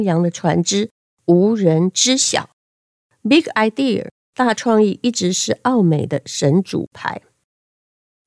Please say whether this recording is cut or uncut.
uncut